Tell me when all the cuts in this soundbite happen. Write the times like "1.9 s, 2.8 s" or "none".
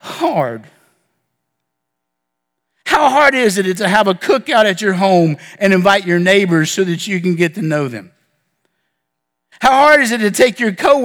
none